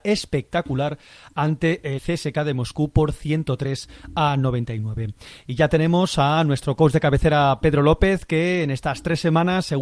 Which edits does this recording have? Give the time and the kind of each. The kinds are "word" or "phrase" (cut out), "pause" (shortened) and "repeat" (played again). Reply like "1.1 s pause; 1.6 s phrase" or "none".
2.0 s word